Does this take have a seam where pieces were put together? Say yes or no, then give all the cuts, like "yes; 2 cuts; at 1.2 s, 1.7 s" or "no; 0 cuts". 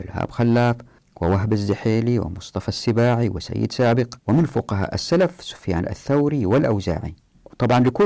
yes; 1 cut; at 4.2 s